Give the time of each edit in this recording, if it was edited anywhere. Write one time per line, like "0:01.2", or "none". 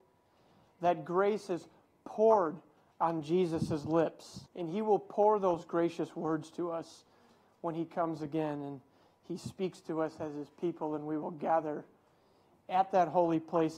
0:04.5